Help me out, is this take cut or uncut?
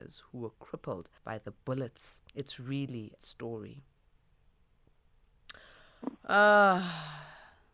cut